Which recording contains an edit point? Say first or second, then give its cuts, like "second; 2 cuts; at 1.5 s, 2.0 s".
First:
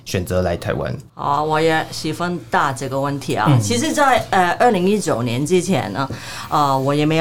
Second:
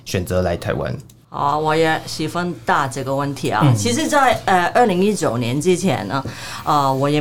first; 1 cut; at 1.1 s